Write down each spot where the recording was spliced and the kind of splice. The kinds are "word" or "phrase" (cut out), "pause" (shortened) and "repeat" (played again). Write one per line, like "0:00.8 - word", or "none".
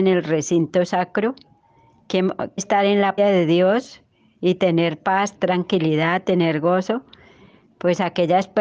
0:02.6 - word
0:03.2 - word
0:05.3 - word